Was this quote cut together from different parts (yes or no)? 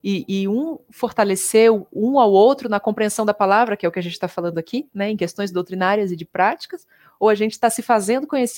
no